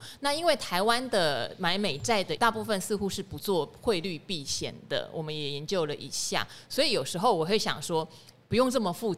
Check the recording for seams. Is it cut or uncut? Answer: cut